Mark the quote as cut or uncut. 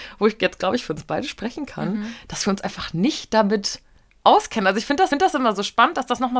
cut